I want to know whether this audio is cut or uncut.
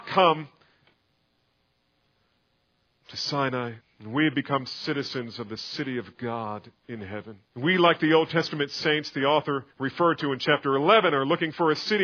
cut